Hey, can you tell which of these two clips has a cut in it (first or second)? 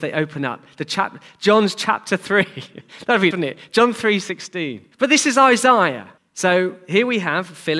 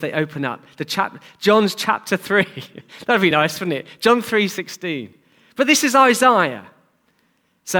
first